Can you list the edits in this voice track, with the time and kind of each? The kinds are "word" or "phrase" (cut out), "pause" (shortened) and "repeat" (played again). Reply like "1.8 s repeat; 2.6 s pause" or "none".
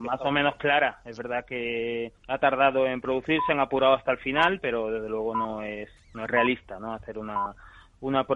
2.2 s pause